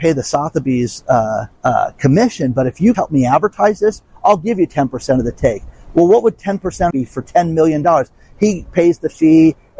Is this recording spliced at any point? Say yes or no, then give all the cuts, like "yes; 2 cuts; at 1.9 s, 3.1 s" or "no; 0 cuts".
yes; 3 cuts; at 1.6 s, 2.9 s, 6.9 s